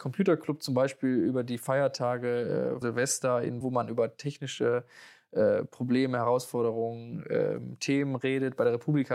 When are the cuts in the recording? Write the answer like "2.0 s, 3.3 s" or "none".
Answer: 2.8 s, 3.6 s

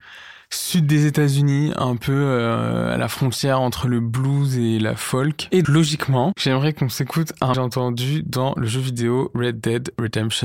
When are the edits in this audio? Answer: 5.6 s, 7.5 s

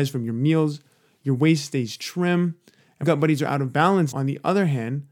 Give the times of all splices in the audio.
3.0 s, 4.1 s

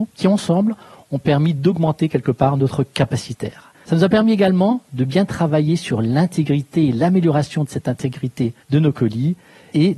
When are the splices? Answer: 3.7 s, 8.6 s

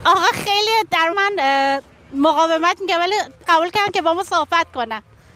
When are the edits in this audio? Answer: 1.1 s, 3.4 s

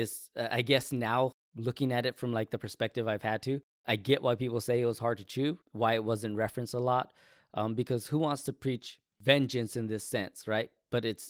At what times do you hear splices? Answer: 1.4 s, 5.6 s, 9.1 s

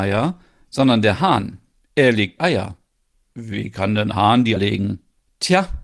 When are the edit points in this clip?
2.4 s, 3.1 s, 4.1 s, 4.6 s

